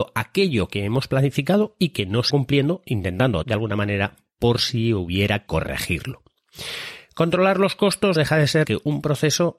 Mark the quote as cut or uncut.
cut